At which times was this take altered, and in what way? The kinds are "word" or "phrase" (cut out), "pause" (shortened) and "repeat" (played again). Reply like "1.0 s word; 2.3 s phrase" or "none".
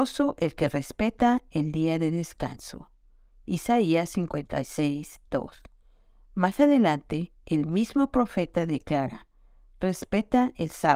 none